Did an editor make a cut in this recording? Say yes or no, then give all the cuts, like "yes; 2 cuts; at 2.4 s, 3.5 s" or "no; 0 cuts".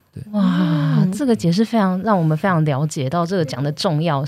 no; 0 cuts